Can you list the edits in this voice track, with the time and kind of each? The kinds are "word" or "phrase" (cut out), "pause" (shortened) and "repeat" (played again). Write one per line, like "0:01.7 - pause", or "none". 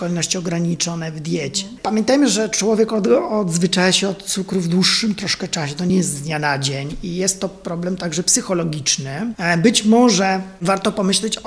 none